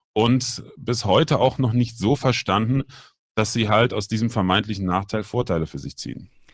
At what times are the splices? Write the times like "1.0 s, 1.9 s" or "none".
none